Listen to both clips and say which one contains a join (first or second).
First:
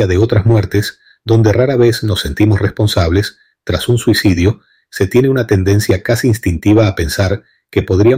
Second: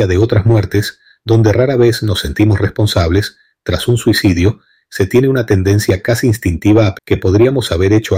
second